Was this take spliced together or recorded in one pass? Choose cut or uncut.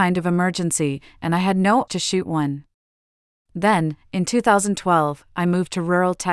cut